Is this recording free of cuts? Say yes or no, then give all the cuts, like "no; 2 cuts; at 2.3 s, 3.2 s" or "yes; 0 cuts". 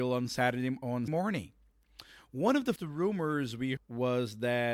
no; 3 cuts; at 1.1 s, 2.8 s, 3.8 s